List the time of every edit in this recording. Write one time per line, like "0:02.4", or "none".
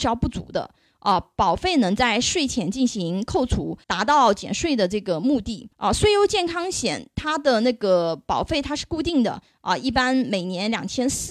0:03.8
0:05.7